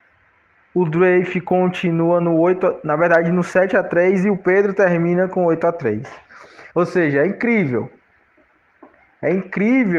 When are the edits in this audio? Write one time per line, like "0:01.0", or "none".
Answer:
0:06.7